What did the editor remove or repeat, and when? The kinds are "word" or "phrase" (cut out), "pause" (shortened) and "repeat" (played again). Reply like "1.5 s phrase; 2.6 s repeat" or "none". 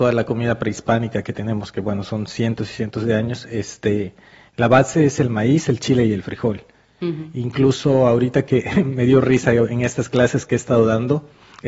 none